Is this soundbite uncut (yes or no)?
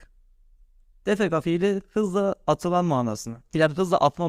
yes